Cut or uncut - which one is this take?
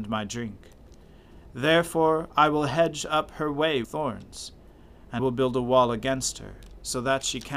cut